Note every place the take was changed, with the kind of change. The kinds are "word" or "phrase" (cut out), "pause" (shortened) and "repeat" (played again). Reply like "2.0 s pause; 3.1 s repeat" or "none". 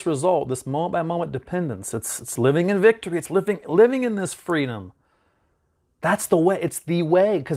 none